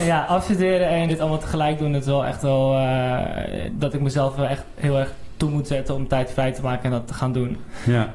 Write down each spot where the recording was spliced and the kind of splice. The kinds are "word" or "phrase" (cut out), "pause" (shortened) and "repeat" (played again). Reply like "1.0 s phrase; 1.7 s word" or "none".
1.1 s word